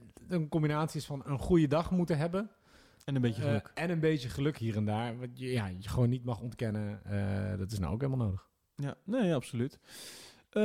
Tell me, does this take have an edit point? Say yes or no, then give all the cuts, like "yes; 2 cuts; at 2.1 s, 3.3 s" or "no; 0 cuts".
no; 0 cuts